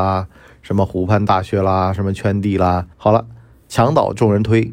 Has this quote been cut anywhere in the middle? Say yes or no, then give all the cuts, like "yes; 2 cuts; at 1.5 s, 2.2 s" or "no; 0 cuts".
yes; 1 cut; at 2.9 s